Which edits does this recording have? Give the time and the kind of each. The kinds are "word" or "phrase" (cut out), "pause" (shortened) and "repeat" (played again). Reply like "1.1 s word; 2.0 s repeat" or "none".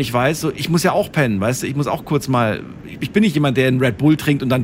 3.0 s word